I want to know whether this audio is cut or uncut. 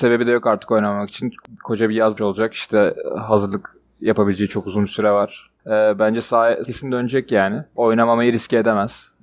cut